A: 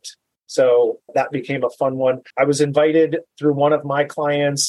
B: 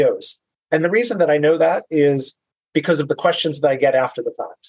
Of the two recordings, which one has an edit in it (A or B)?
A